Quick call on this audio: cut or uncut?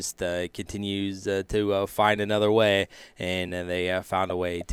uncut